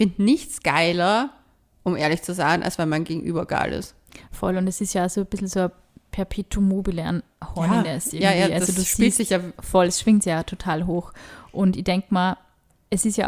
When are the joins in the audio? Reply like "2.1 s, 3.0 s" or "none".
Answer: none